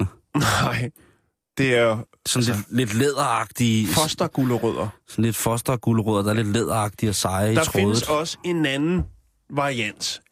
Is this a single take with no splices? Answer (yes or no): yes